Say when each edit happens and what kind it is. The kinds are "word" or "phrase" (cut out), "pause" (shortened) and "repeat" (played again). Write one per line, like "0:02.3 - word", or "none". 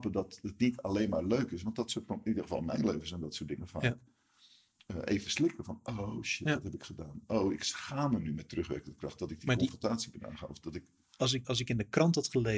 0:11.4 - word